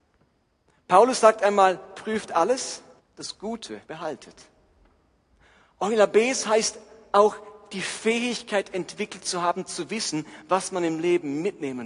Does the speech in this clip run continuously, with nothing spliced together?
no; 2 cuts; at 3.0 s, 3.8 s

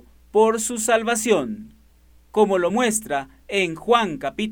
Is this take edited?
no; 0 cuts

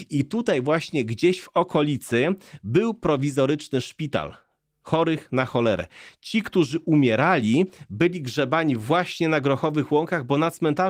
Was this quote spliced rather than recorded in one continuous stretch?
no; 0 cuts

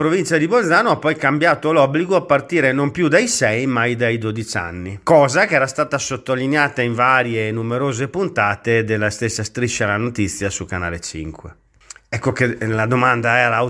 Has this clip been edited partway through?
no; 0 cuts

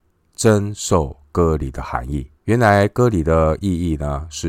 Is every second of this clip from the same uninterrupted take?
no; 1 cut; at 2.4 s

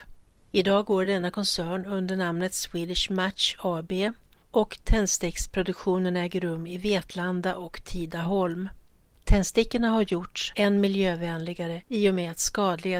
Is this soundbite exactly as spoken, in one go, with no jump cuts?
yes; 0 cuts

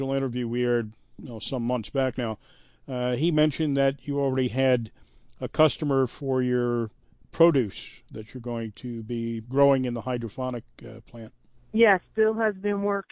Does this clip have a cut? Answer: no; 0 cuts

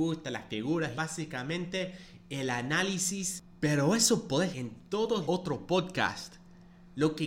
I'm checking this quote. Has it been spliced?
yes; 3 cuts; at 0.9 s, 4.5 s, 5.3 s

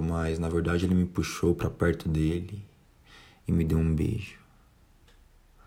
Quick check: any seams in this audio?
no; 0 cuts

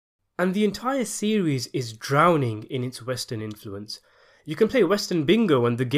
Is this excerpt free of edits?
yes; 0 cuts

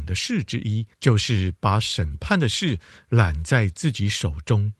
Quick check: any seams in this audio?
yes; 1 cut; at 0.9 s

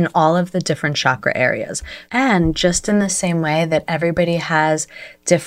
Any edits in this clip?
no; 0 cuts

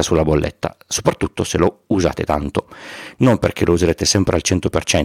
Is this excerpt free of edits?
yes; 0 cuts

